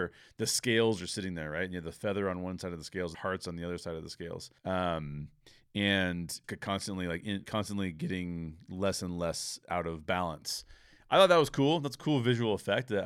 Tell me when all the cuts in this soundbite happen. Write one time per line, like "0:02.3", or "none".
0:03.1
0:04.6
0:06.4
0:07.4